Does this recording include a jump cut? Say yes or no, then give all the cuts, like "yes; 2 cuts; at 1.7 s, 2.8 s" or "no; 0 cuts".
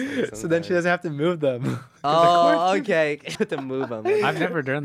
yes; 1 cut; at 3.3 s